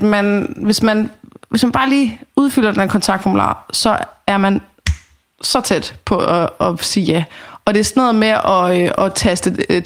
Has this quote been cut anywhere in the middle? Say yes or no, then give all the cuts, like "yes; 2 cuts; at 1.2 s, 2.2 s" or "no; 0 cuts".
no; 0 cuts